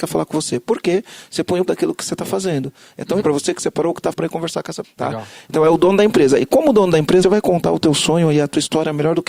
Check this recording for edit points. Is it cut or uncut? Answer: cut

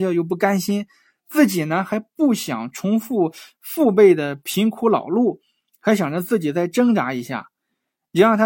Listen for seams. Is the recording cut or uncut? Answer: uncut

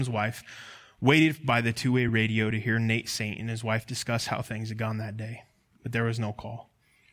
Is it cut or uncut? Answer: uncut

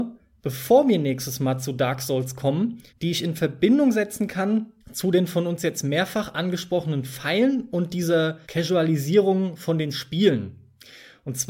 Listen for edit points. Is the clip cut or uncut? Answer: cut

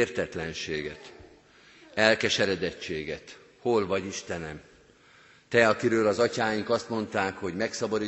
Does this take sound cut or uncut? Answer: uncut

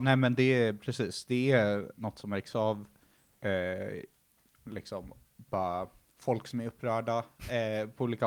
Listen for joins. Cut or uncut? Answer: uncut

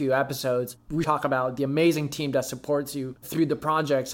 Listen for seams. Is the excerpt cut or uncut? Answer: cut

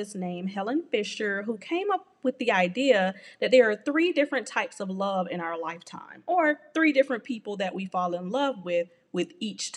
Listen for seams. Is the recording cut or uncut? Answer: uncut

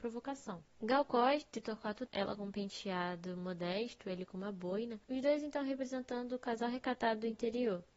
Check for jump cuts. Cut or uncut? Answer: cut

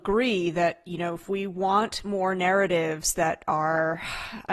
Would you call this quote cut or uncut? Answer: uncut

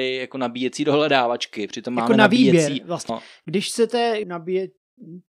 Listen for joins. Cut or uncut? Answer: cut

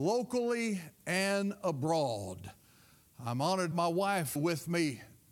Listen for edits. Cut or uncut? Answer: cut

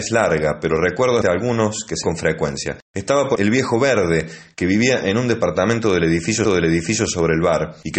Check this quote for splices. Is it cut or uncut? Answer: cut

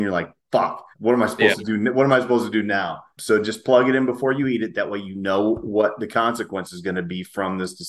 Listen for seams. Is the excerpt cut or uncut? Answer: cut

